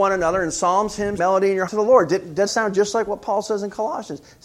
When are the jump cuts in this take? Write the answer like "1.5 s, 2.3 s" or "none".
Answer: 1.2 s, 1.7 s, 2.5 s

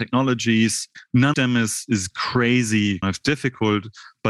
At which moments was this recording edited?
1.3 s, 3.0 s

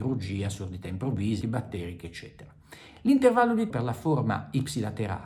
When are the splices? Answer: 1.4 s, 3.7 s

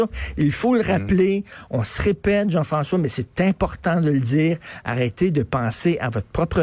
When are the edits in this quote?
none

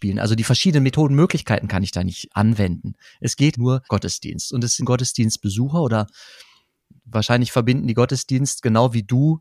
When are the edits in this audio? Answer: 2.3 s, 3.5 s, 3.9 s, 4.8 s

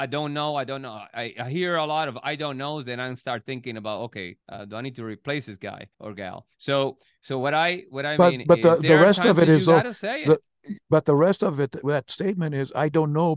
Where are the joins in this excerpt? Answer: 4.4 s, 5.9 s, 6.5 s

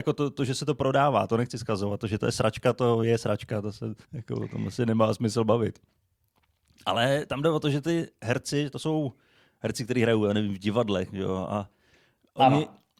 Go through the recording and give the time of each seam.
4.0 s

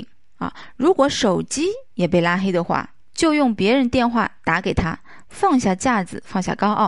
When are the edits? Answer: 3.0 s

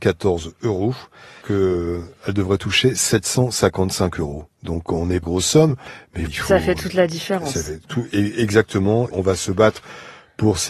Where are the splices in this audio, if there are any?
1.4 s, 5.2 s, 6.3 s, 7.8 s, 9.1 s

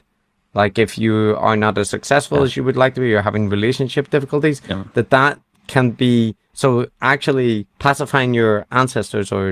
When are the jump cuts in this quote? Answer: 7.7 s

